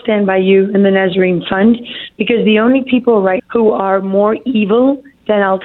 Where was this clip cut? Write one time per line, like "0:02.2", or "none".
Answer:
0:03.4